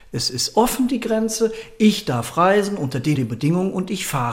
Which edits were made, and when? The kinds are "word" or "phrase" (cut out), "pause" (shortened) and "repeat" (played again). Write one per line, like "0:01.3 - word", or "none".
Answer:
0:03.1 - word